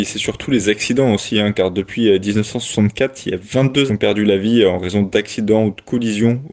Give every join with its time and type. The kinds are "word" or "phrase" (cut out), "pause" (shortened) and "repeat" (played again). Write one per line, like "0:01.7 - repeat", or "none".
0:03.9 - phrase